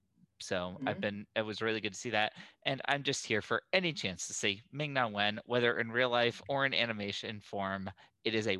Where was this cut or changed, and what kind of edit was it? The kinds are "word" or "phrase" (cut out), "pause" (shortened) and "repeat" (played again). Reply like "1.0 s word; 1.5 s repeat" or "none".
none